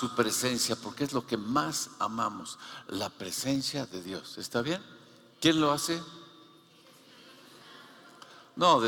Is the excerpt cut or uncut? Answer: uncut